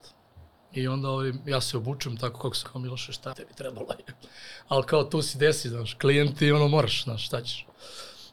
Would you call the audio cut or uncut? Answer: cut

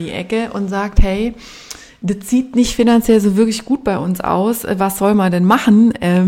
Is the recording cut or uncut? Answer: uncut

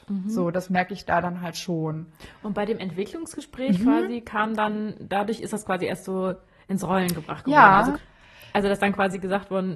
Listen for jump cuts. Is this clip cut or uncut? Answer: uncut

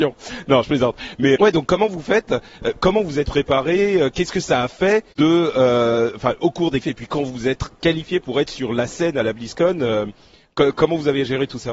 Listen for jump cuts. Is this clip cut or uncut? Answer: cut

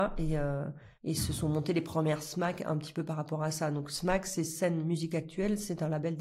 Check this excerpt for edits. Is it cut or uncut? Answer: cut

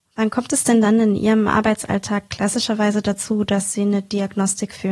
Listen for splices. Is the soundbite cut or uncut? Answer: uncut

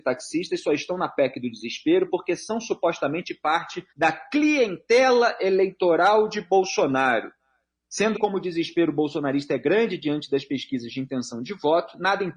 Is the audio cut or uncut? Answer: cut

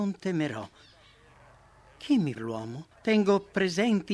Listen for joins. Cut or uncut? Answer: cut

